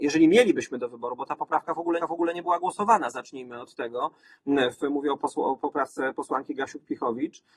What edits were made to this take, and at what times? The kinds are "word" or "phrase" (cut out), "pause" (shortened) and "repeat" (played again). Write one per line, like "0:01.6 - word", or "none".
0:02.0 - repeat